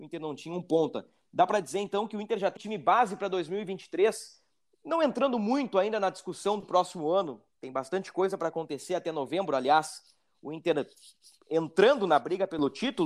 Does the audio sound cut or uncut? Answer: cut